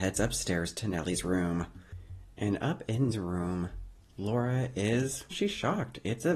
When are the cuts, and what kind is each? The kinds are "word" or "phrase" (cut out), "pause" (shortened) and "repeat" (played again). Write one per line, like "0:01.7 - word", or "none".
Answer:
0:03.1 - word
0:05.3 - word